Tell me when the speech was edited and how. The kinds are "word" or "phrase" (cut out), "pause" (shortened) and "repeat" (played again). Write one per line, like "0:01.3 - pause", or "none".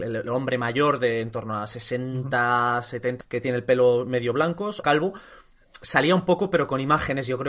0:03.2 - word
0:04.8 - word

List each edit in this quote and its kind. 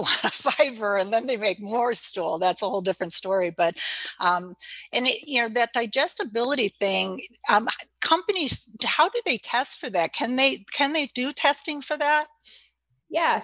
none

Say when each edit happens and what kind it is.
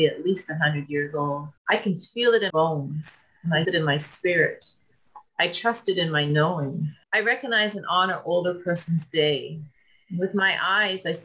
0:01.6 - pause
0:02.5 - word
0:03.6 - word
0:07.0 - pause

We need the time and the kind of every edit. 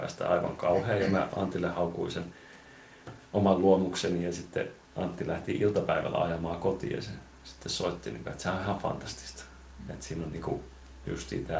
0:04.8 - pause

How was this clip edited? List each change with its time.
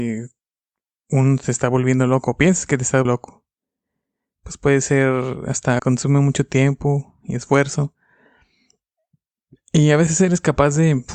0:03.0 - word
0:05.8 - phrase

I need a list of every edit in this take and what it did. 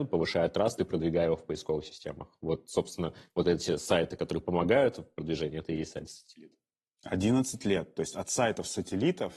none

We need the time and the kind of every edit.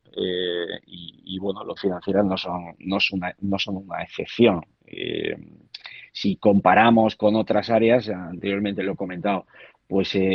0:01.8 - phrase

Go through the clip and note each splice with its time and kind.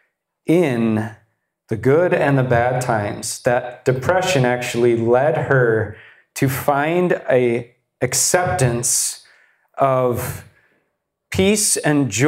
none

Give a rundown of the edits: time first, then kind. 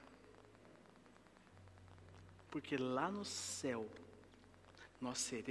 none

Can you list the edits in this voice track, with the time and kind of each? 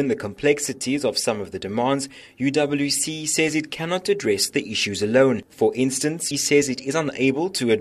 0:06.3 - word

